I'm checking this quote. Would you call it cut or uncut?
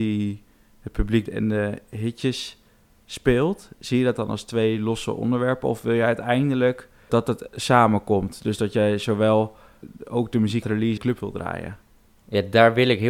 cut